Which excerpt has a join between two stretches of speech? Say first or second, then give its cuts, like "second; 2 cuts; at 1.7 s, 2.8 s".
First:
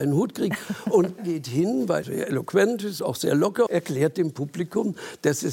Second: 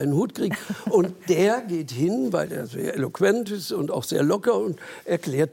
first; 4 cuts; at 1.2 s, 2.0 s, 3.0 s, 3.7 s